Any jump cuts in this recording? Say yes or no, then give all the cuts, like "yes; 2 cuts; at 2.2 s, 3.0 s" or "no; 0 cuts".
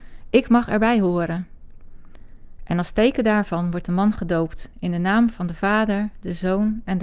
no; 0 cuts